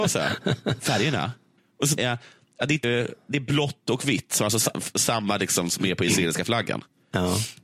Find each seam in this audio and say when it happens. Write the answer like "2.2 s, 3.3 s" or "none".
1.6 s, 2.0 s, 2.8 s

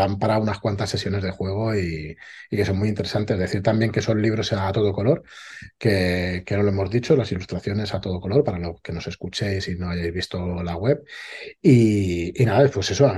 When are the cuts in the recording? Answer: none

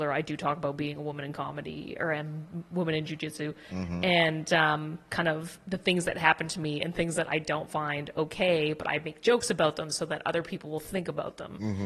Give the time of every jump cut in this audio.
none

